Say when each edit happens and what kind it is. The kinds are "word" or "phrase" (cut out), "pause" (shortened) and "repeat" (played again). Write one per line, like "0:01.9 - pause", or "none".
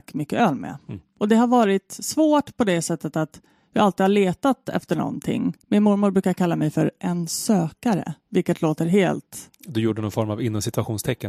0:01.1 - pause
0:05.6 - pause
0:08.2 - pause